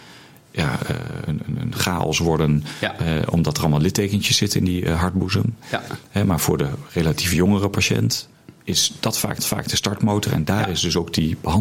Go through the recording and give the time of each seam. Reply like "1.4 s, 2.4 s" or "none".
1.3 s, 8.6 s, 9.4 s